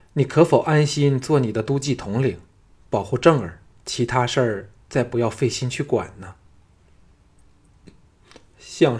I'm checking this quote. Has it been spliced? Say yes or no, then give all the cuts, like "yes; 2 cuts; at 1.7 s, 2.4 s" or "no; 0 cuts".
yes; 1 cut; at 3.7 s